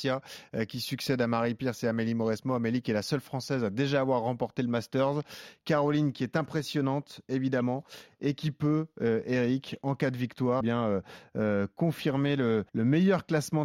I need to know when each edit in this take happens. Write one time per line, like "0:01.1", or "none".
0:10.6
0:12.7